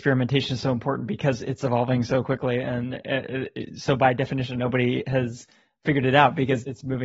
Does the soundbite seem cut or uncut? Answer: uncut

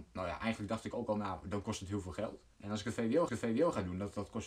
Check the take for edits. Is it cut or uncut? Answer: cut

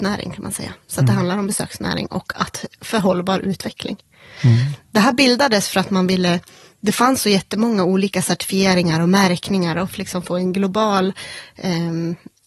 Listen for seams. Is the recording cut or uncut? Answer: uncut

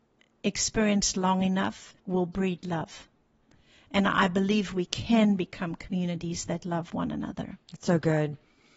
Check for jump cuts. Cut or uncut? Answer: cut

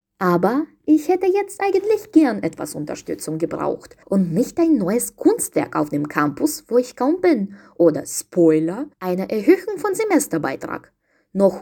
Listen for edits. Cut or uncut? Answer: cut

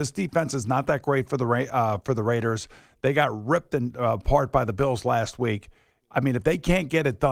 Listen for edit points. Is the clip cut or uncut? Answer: uncut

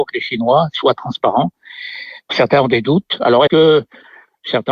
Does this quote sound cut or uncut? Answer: cut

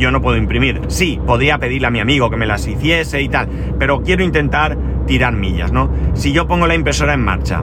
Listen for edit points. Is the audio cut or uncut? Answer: uncut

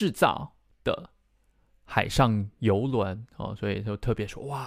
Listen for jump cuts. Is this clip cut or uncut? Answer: uncut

